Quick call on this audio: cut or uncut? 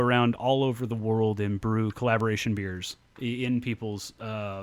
uncut